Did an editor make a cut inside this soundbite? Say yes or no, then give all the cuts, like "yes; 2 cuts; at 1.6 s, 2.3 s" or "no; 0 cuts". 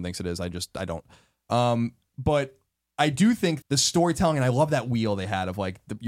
yes; 1 cut; at 3.6 s